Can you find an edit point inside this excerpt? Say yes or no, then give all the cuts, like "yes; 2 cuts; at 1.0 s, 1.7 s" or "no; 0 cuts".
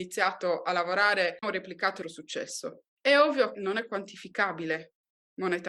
yes; 3 cuts; at 1.4 s, 2.0 s, 3.5 s